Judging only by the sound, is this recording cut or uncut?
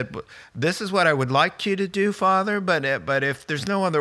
uncut